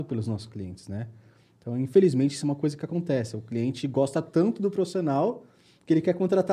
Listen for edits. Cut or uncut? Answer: uncut